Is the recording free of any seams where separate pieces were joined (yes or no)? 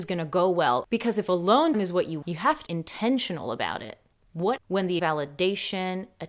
no